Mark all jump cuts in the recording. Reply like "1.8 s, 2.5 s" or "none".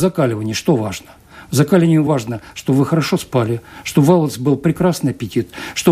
none